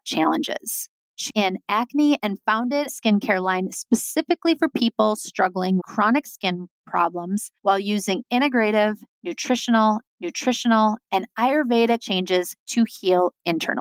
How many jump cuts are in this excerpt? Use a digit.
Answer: 7